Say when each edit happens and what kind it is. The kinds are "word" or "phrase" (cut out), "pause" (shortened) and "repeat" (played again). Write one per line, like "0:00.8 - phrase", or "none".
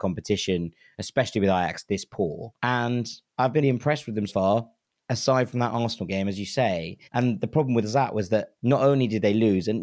0:02.5 - pause
0:03.6 - word
0:04.3 - word
0:07.0 - pause
0:08.6 - pause